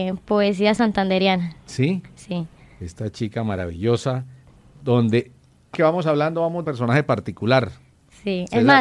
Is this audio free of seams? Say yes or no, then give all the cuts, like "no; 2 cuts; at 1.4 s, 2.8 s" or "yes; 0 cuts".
no; 3 cuts; at 2.6 s, 5.7 s, 6.6 s